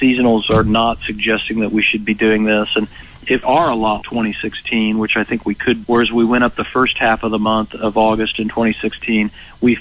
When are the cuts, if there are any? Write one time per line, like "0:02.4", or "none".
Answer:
0:03.4
0:04.0
0:05.8